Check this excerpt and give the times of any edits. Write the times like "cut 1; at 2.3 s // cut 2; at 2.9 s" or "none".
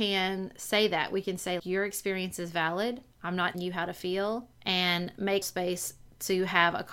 cut 1; at 1.6 s // cut 2; at 3.5 s // cut 3; at 4.5 s // cut 4; at 5.4 s